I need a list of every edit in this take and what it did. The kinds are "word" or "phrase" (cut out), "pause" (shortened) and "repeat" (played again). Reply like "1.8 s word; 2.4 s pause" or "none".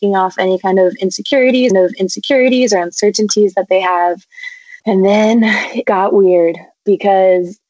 1.7 s repeat; 4.8 s pause; 5.8 s word